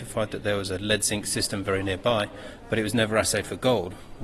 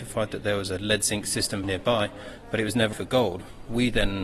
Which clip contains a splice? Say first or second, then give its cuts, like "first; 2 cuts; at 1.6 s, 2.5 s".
second; 2 cuts; at 1.6 s, 2.9 s